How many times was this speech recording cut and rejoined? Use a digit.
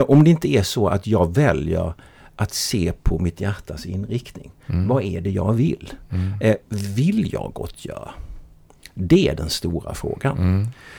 0